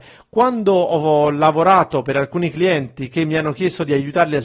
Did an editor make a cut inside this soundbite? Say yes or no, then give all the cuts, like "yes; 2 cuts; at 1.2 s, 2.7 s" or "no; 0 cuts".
no; 0 cuts